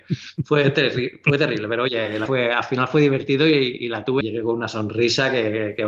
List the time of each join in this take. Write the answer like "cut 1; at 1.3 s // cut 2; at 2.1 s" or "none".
cut 1; at 2.3 s // cut 2; at 4.2 s